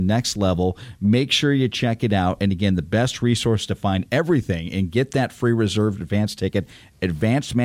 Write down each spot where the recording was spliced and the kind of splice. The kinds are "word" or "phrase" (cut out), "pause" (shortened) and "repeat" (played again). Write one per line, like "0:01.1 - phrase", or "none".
none